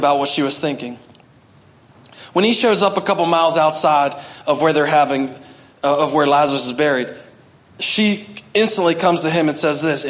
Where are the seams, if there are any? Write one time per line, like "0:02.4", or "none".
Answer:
none